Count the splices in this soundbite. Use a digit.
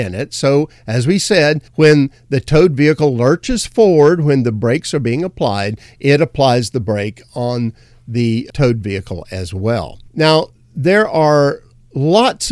2